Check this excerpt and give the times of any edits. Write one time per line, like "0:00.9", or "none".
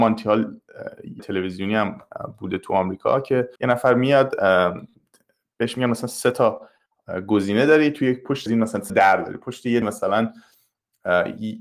0:01.2
0:03.6
0:08.5
0:08.9
0:09.8